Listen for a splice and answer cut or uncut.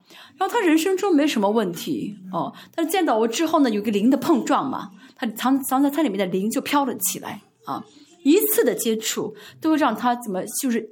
uncut